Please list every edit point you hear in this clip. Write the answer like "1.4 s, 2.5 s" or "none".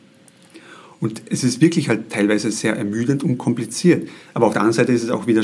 none